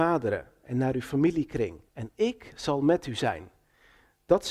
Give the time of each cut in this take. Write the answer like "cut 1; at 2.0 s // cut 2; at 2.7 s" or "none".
cut 1; at 1.9 s